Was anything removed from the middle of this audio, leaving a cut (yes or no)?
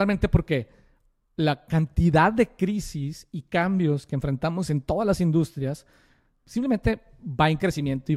no